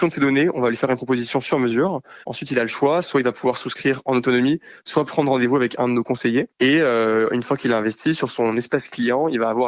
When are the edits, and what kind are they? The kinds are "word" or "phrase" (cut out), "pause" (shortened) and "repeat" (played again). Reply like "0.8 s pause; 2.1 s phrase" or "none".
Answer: 2.2 s pause; 6.5 s pause